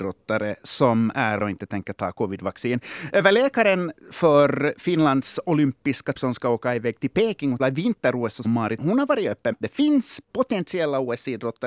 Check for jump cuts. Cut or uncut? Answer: cut